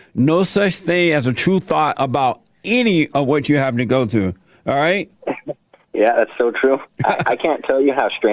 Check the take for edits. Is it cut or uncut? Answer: uncut